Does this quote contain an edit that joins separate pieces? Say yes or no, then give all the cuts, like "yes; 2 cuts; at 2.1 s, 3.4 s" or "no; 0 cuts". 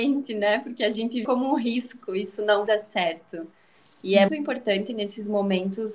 yes; 3 cuts; at 1.2 s, 2.7 s, 4.3 s